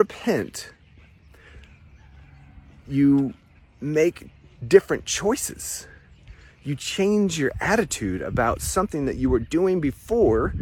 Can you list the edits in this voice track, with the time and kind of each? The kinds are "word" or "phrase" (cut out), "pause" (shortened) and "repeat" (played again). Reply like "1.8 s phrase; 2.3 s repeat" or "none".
none